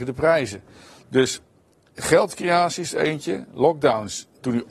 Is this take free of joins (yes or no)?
yes